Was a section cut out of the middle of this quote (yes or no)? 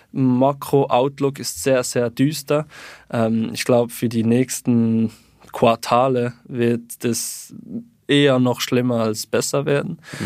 no